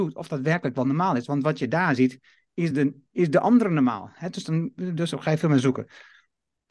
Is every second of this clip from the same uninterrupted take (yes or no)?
yes